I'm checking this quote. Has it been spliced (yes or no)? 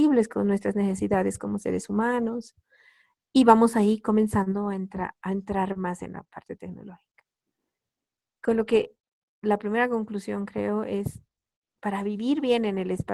no